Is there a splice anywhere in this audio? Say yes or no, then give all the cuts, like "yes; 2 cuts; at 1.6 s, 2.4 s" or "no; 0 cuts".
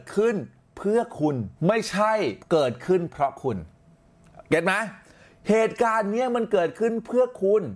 yes; 3 cuts; at 1.6 s, 2.4 s, 4.4 s